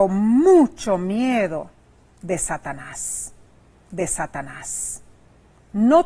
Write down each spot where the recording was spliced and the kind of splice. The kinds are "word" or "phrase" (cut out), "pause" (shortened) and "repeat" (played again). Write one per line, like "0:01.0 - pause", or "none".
0:03.9 - repeat

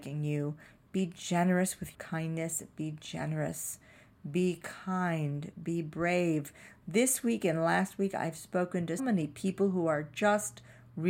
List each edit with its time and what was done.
0:01.9 - word
0:09.0 - word

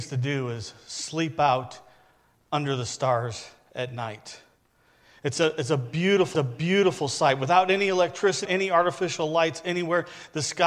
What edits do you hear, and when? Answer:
0:06.3 - repeat
0:08.4 - word

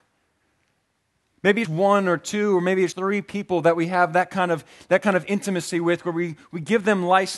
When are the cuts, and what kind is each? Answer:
0:01.6 - word
0:02.9 - word

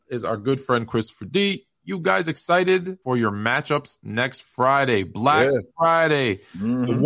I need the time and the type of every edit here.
0:03.0 - pause

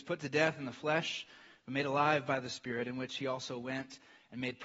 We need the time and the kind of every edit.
none

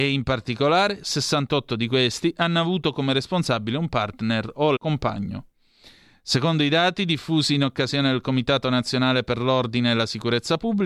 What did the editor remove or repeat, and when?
0:04.8 - word

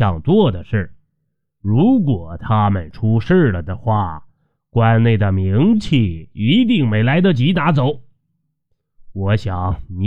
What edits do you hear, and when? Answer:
none

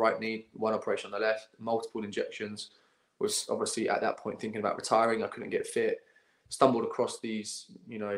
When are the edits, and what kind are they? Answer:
none

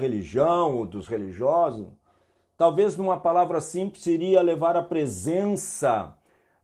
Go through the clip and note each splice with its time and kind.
none

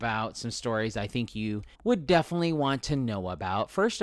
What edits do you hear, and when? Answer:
0:01.7 - pause

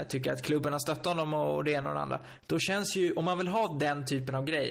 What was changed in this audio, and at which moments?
none

